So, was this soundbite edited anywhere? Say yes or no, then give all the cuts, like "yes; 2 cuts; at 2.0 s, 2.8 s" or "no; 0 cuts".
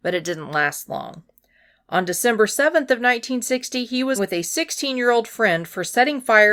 yes; 1 cut; at 4.2 s